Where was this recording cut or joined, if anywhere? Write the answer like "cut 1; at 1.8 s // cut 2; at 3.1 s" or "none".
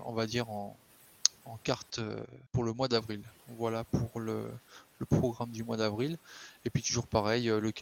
cut 1; at 2.5 s

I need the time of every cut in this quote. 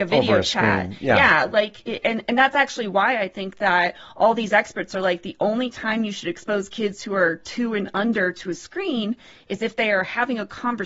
none

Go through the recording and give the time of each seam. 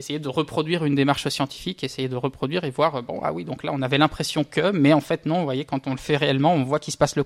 none

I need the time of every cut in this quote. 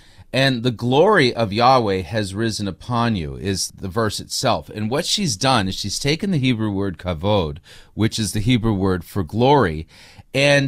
none

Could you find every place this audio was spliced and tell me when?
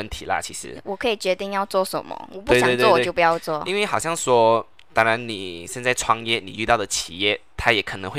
none

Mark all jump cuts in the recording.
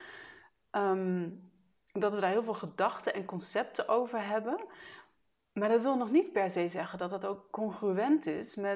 none

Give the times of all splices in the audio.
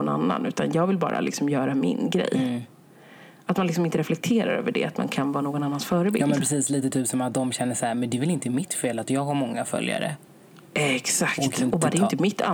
none

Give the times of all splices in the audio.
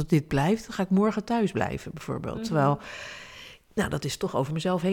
none

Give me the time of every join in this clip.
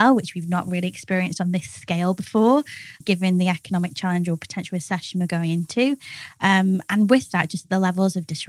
cut 1; at 3.0 s

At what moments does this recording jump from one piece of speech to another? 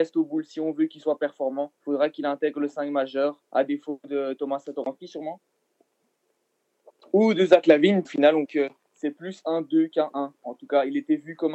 cut 1; at 1.7 s // cut 2; at 3.5 s // cut 3; at 8.0 s // cut 4; at 8.4 s // cut 5; at 10.3 s

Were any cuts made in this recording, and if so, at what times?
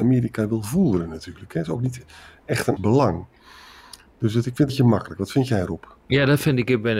cut 1; at 2.8 s // cut 2; at 4.7 s

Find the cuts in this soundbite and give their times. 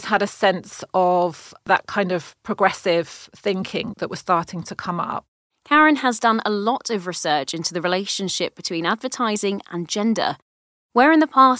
cut 1; at 3.9 s // cut 2; at 5.5 s

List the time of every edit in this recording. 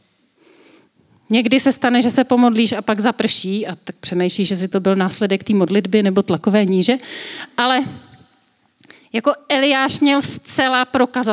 none

